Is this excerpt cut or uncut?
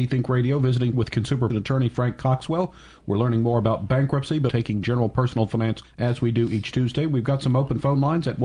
cut